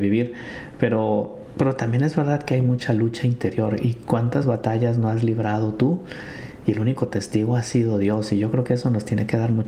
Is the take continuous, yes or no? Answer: yes